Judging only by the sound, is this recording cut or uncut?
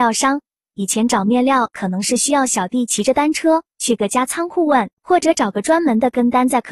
cut